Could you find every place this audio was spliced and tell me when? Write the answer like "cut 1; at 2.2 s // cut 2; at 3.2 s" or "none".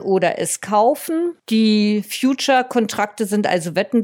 cut 1; at 1.4 s